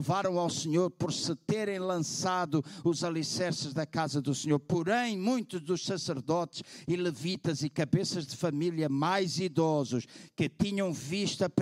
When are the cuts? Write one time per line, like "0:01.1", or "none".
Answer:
none